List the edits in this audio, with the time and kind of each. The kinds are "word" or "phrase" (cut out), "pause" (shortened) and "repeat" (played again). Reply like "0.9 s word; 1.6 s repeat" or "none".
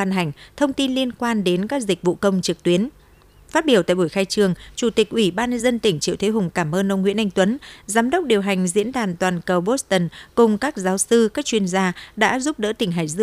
none